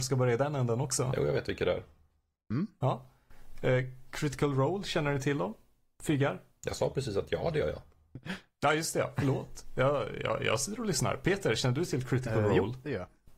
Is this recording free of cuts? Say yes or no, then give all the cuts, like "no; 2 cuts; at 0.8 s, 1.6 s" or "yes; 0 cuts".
yes; 0 cuts